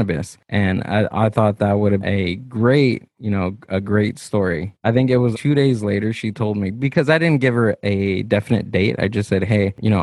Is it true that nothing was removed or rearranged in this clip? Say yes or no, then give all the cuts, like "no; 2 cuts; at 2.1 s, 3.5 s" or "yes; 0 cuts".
no; 2 cuts; at 2.0 s, 5.3 s